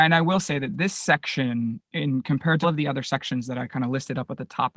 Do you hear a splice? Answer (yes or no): yes